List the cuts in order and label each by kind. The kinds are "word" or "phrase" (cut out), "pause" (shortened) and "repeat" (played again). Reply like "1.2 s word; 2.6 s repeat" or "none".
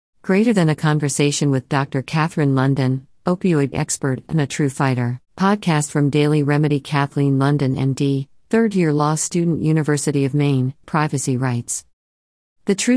3.7 s word; 5.3 s pause; 10.8 s word

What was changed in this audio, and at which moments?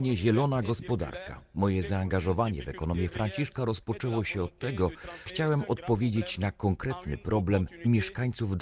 5.3 s word

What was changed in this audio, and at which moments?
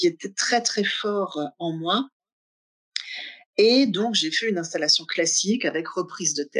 none

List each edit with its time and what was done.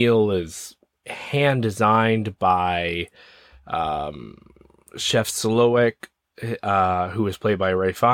none

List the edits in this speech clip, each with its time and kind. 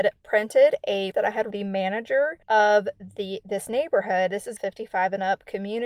1.1 s word; 1.5 s phrase; 4.6 s word

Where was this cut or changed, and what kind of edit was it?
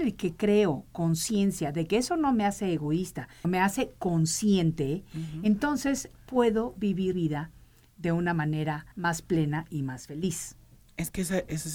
3.4 s word; 7.1 s word; 8.9 s pause

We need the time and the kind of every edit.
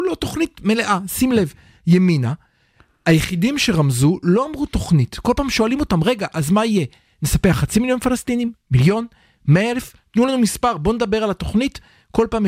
none

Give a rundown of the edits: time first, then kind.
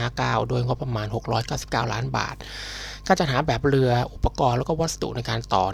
none

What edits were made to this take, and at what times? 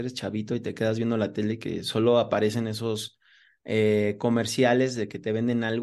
none

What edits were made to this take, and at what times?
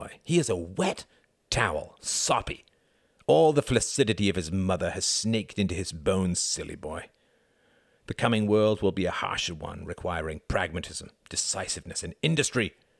none

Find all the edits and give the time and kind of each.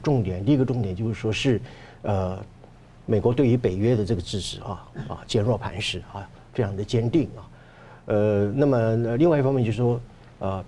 none

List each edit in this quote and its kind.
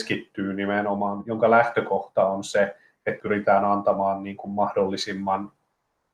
3.2 s word

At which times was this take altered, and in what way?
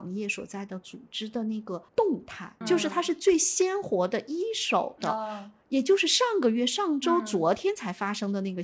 1.9 s pause; 2.6 s word

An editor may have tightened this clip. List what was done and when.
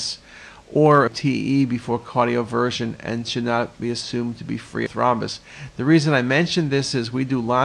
1.1 s phrase; 4.9 s phrase

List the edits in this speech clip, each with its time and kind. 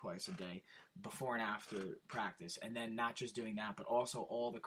none

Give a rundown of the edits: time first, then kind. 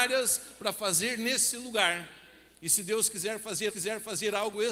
3.7 s repeat

